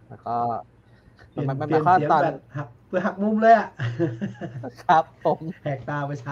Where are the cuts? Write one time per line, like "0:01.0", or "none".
0:01.3
0:02.8